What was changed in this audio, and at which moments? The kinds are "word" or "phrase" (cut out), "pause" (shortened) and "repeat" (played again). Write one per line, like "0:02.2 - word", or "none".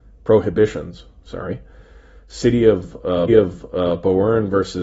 0:03.3 - repeat